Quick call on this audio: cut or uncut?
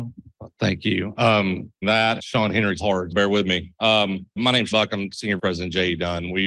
cut